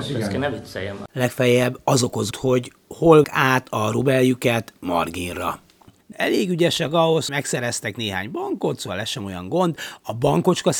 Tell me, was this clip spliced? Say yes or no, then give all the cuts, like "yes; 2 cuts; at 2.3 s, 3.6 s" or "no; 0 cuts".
yes; 4 cuts; at 2.3 s, 3.2 s, 6.1 s, 7.3 s